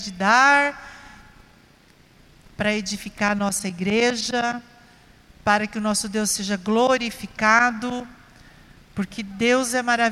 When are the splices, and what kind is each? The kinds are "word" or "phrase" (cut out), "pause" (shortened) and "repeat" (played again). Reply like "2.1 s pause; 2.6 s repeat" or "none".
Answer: none